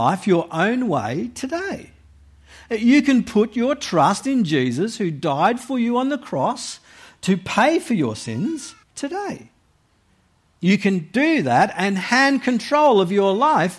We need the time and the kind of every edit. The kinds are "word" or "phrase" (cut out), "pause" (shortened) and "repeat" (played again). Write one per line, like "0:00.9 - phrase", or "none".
0:08.8 - pause